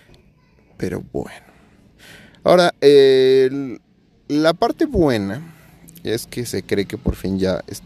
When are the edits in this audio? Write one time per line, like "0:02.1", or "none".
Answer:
none